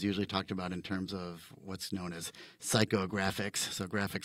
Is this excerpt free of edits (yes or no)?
yes